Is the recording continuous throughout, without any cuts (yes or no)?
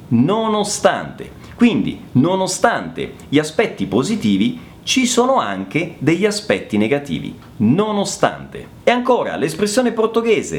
yes